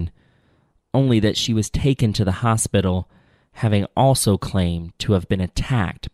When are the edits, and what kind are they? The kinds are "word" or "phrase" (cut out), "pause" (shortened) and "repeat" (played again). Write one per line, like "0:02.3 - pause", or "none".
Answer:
none